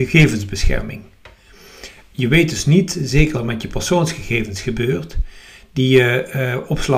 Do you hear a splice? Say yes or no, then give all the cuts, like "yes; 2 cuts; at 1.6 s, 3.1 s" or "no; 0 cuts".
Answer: yes; 1 cut; at 3.3 s